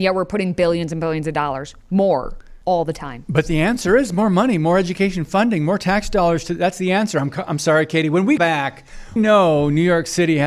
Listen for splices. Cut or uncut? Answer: cut